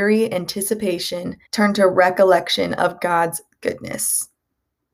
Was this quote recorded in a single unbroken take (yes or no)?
no